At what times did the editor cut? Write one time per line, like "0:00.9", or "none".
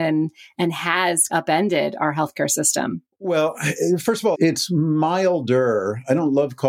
0:01.3
0:03.1
0:04.3